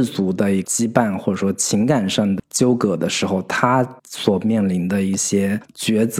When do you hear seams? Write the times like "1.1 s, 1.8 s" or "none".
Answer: 4.0 s